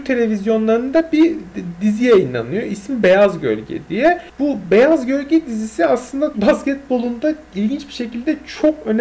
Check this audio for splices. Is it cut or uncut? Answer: cut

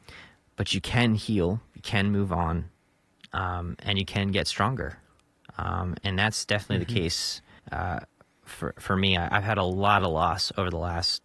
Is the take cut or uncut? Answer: cut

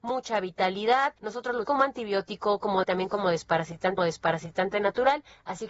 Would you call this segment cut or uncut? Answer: cut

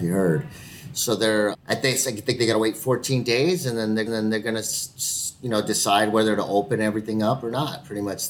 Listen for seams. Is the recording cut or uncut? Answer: cut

